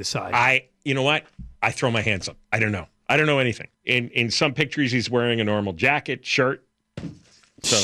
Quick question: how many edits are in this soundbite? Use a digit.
3